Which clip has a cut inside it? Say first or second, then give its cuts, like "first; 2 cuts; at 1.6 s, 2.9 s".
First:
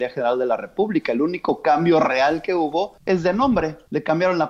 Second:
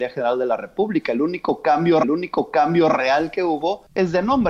second; 1 cut; at 2.0 s